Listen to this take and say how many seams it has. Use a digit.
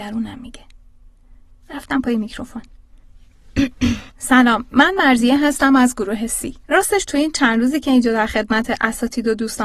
2